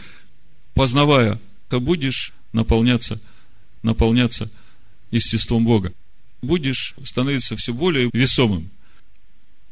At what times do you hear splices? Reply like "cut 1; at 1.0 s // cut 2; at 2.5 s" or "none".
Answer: cut 1; at 1.7 s // cut 2; at 3.8 s // cut 3; at 8.1 s